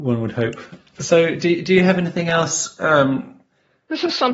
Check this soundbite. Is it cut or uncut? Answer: uncut